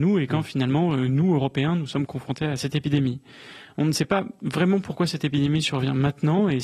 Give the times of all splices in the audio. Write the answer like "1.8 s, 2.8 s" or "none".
none